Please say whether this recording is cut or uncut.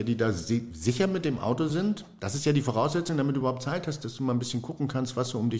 uncut